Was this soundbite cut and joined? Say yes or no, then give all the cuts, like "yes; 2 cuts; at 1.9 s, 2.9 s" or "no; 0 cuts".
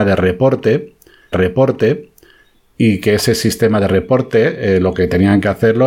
yes; 1 cut; at 1.3 s